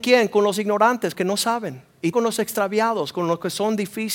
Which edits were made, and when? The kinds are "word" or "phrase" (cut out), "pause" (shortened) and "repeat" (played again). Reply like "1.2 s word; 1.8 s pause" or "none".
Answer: 1.1 s phrase; 2.1 s word